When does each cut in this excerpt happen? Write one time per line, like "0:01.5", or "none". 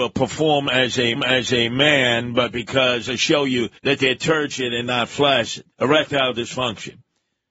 0:01.2
0:03.1
0:03.8
0:05.7